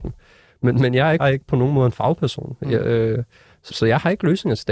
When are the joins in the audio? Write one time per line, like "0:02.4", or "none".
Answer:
0:01.2
0:03.7